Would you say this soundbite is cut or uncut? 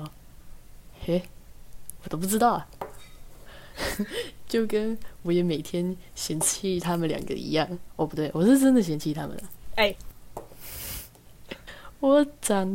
cut